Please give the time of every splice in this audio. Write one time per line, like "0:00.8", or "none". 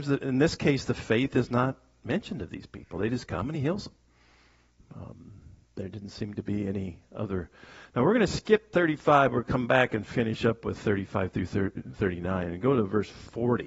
none